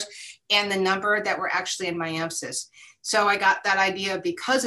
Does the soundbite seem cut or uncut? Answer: uncut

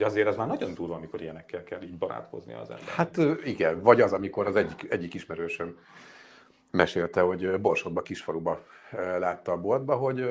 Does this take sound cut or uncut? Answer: uncut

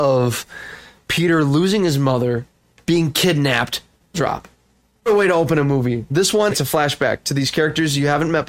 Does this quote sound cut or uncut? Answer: cut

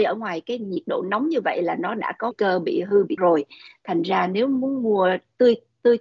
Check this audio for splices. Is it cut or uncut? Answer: cut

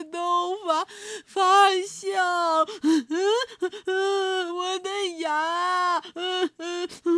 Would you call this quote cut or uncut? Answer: cut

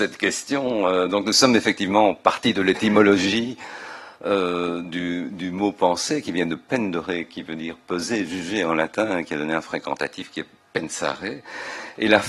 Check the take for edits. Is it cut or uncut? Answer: uncut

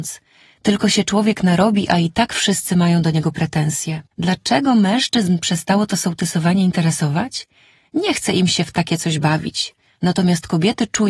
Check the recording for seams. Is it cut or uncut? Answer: cut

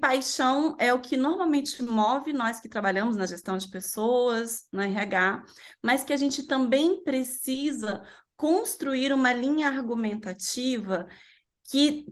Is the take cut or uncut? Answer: uncut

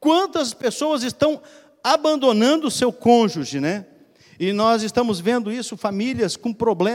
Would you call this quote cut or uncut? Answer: uncut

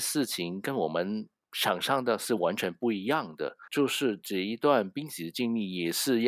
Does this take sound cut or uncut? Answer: cut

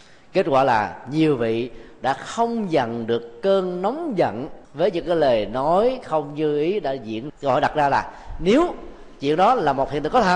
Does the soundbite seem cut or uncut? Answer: cut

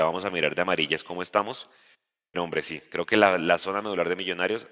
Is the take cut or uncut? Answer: uncut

